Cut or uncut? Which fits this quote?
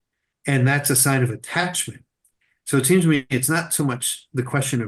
uncut